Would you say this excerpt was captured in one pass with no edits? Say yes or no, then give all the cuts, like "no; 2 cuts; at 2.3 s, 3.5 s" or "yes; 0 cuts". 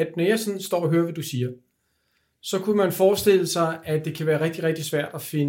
yes; 0 cuts